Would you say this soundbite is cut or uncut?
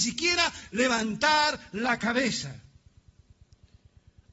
uncut